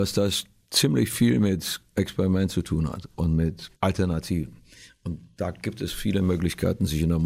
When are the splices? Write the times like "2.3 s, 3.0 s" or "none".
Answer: 3.8 s